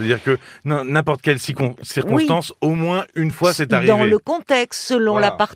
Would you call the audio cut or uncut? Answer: uncut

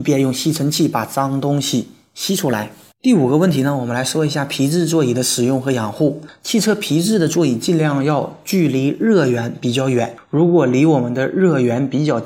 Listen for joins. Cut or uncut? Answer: uncut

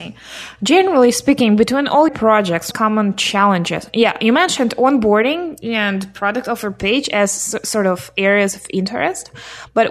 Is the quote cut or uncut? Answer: cut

